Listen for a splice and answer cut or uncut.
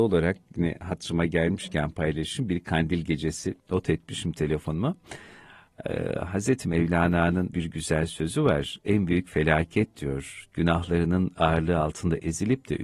cut